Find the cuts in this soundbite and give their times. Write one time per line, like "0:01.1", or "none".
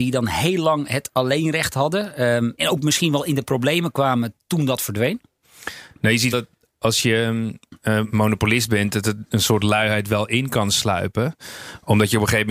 0:02.6
0:06.3
0:08.1